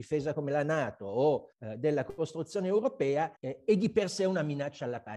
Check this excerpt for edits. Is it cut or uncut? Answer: cut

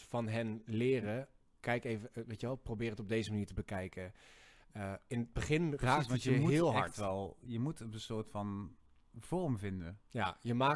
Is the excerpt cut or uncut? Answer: uncut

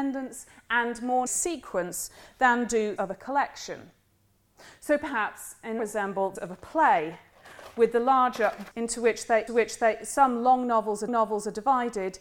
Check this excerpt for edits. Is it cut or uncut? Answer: cut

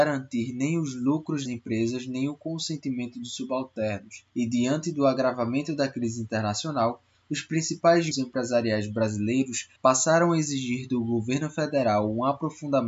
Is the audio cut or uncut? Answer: cut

